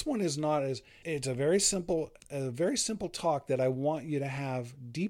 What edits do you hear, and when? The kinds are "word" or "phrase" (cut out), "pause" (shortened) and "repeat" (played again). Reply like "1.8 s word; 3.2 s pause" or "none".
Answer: 1.0 s word; 2.2 s word